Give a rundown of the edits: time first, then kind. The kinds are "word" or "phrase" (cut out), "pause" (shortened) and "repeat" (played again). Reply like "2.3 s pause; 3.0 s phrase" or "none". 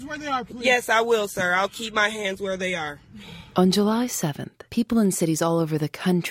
4.7 s pause